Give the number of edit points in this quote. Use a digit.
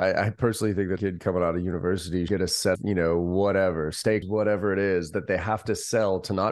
4